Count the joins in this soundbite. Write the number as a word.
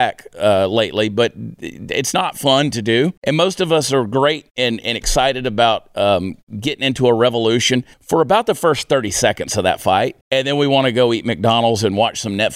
three